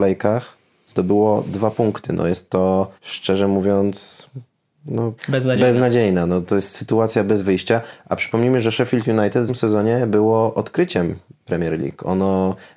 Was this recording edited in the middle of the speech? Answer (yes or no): yes